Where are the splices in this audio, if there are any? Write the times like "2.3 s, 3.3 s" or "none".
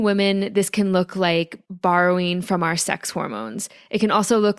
1.6 s